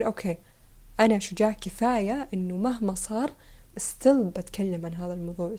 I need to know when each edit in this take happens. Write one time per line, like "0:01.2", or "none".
0:03.7

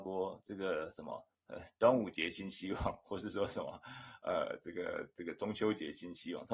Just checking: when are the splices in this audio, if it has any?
0:01.3

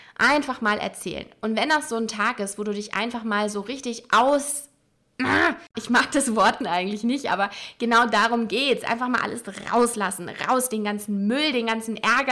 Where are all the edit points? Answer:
0:06.6

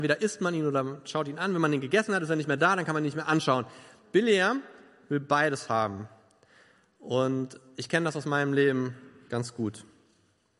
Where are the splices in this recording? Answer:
none

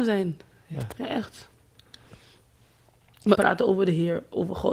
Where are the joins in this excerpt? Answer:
0:03.4

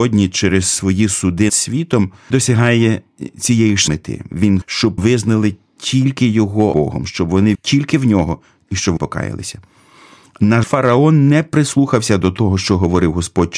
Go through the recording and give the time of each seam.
0:01.5
0:02.3
0:03.9
0:04.6
0:05.0
0:06.7
0:07.5
0:09.0
0:10.6

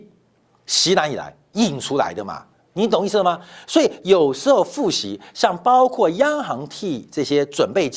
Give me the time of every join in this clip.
none

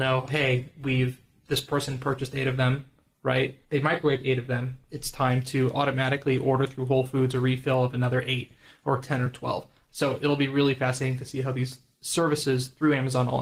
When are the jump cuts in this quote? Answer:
0:03.6

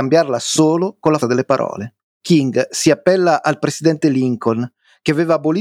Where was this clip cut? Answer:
0:01.2
0:02.1

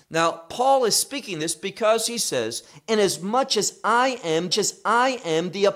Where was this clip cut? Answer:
0:04.5

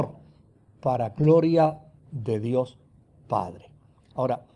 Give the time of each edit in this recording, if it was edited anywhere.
none

